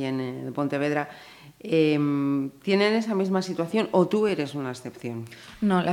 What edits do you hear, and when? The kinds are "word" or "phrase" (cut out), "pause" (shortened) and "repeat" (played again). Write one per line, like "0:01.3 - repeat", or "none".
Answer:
none